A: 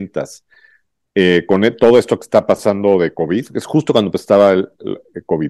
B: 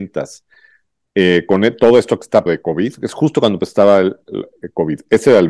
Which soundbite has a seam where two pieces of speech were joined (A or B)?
B